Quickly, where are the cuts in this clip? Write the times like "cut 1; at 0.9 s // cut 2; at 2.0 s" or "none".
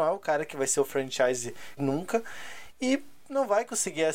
cut 1; at 1.8 s